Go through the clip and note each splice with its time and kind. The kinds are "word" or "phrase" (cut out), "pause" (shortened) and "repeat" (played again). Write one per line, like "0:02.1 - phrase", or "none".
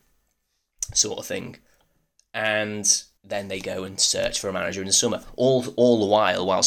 0:03.2 - pause